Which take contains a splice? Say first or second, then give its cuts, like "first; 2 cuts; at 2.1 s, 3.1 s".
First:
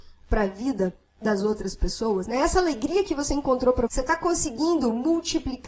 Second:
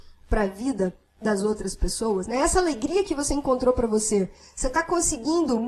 first; 1 cut; at 3.9 s